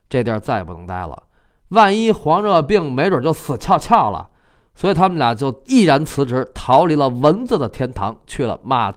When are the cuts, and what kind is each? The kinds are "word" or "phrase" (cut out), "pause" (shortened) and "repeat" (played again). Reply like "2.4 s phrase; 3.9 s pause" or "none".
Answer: none